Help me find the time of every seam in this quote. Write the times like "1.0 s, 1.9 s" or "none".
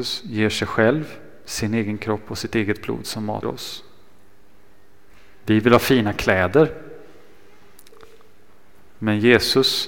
3.4 s